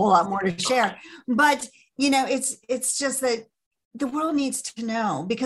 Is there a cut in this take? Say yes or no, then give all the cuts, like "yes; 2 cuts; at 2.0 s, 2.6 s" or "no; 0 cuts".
no; 0 cuts